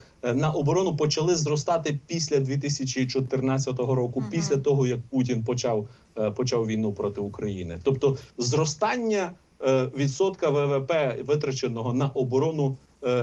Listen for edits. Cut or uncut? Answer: cut